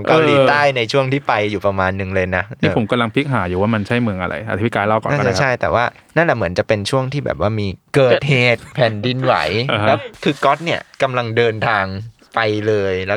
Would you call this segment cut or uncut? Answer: cut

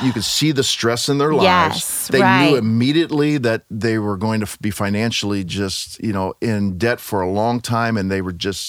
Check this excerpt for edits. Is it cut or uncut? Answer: uncut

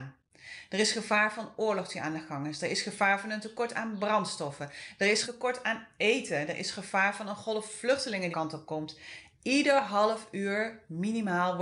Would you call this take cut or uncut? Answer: cut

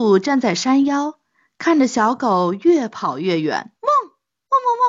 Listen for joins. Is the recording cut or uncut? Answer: cut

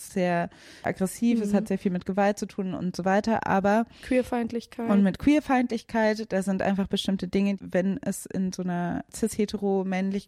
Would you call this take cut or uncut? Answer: uncut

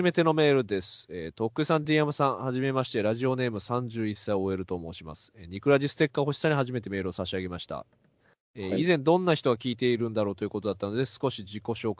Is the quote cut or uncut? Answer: uncut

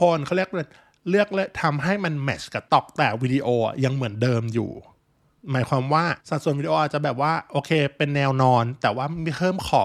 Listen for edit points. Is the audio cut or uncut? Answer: cut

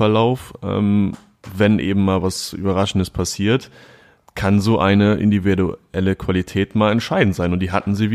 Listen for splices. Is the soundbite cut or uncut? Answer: uncut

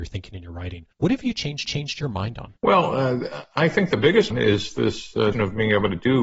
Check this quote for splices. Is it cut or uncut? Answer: cut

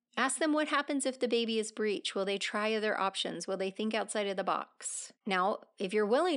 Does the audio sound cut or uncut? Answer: cut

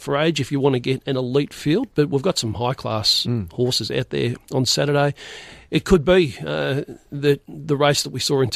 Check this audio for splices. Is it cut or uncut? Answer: uncut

